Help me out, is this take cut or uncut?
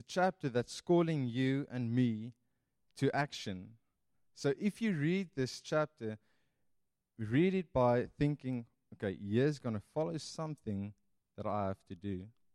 uncut